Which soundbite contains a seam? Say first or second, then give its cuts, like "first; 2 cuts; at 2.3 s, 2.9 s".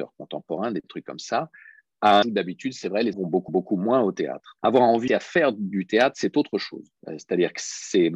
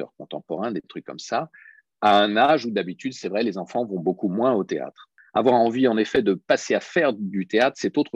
first; 6 cuts; at 2.2 s, 3.1 s, 3.5 s, 4.6 s, 5.1 s, 7.0 s